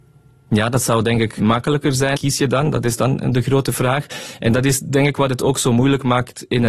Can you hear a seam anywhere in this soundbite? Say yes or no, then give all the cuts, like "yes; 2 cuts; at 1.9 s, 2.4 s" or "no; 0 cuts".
yes; 2 cuts; at 1.4 s, 2.1 s